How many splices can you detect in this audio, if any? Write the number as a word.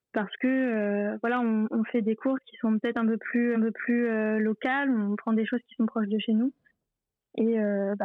one